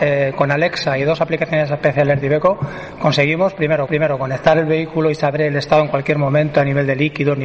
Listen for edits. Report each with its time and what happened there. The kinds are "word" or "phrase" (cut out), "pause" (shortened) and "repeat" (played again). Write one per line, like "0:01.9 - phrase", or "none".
0:03.9 - repeat

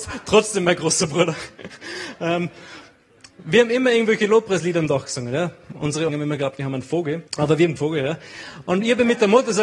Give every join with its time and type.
0:06.1 - word
0:07.3 - pause
0:07.8 - phrase

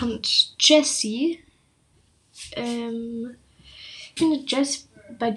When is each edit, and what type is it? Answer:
0:04.2 - word

